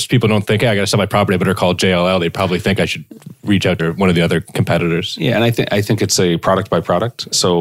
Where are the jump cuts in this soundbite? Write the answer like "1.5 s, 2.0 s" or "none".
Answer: 3.8 s